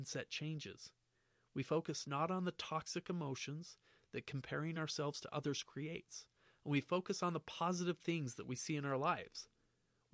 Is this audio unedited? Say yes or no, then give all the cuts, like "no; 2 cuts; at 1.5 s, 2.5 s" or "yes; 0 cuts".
yes; 0 cuts